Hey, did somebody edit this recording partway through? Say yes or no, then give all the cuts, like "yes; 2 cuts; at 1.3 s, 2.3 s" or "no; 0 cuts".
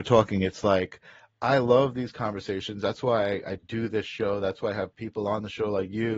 no; 0 cuts